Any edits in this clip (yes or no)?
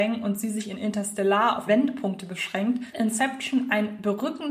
yes